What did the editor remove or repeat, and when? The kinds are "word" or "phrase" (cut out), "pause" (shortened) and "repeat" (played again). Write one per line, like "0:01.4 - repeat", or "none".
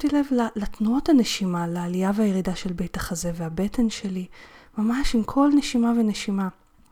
none